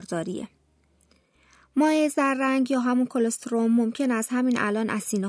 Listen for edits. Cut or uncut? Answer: uncut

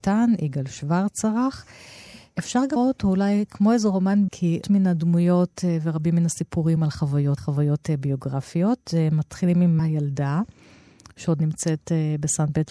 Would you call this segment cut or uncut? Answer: cut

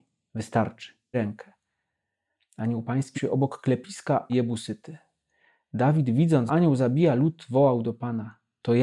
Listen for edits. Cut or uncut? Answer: cut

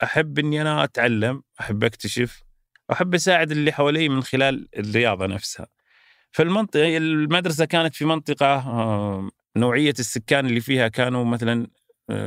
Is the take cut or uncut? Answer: uncut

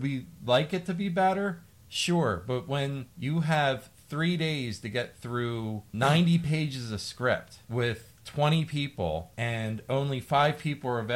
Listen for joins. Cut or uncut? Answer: uncut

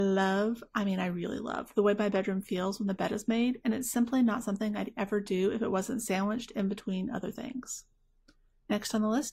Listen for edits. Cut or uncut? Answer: uncut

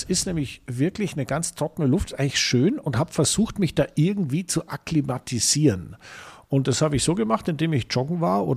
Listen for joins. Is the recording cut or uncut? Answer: uncut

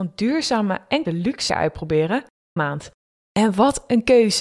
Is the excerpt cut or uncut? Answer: cut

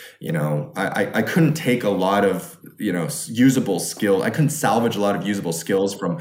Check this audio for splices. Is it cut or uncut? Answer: uncut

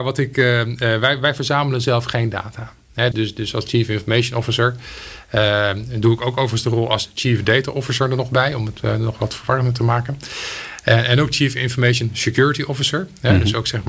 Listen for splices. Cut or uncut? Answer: cut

